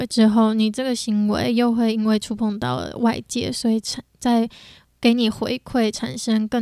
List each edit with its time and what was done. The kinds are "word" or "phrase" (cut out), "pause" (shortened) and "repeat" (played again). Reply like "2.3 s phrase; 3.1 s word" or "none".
none